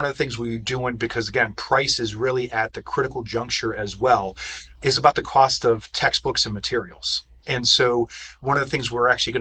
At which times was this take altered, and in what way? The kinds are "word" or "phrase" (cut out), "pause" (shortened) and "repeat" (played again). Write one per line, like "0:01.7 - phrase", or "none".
none